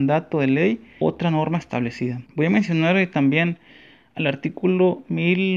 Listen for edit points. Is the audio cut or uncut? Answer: cut